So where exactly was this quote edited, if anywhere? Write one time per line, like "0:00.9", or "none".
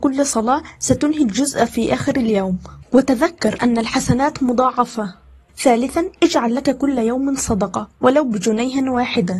none